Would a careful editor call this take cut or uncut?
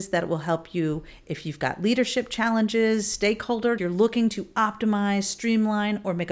cut